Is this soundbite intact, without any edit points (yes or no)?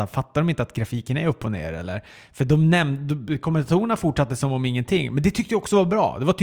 yes